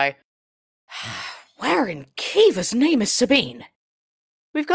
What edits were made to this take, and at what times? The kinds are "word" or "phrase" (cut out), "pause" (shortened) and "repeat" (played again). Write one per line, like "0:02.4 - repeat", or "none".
none